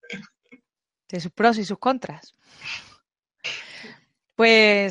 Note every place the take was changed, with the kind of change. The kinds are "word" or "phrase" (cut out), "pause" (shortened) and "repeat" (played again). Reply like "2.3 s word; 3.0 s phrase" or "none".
none